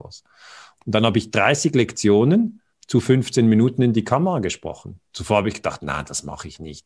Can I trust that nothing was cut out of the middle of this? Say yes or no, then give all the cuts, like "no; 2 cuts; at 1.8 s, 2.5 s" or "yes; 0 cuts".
yes; 0 cuts